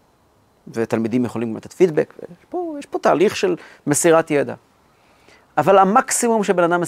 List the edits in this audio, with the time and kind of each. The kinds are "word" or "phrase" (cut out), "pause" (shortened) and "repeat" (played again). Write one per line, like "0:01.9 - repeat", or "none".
none